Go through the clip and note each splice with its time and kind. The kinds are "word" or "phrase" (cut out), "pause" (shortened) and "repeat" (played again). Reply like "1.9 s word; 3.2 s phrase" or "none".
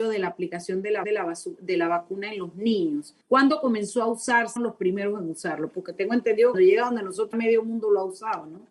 1.0 s repeat; 3.2 s pause; 4.6 s phrase; 6.5 s word; 7.3 s word